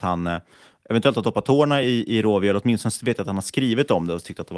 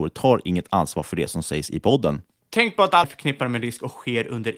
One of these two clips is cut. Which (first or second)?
second